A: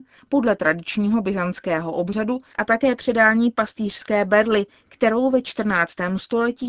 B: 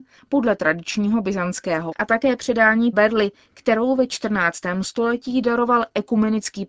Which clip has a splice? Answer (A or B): B